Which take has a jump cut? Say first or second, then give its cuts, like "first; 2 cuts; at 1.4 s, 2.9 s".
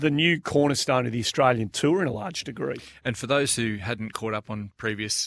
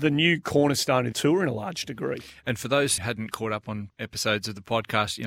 second; 3 cuts; at 1.1 s, 3.0 s, 3.9 s